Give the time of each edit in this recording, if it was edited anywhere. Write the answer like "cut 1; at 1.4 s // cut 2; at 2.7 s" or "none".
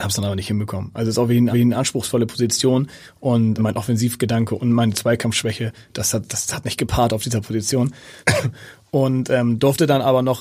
cut 1; at 1.5 s // cut 2; at 3.6 s // cut 3; at 6.3 s // cut 4; at 8.2 s